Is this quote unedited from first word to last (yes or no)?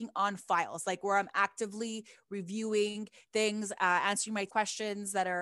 no